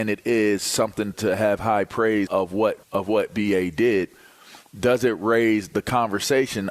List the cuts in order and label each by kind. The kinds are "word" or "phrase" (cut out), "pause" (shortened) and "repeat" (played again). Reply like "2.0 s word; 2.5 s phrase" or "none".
1.1 s word; 2.3 s word; 2.8 s pause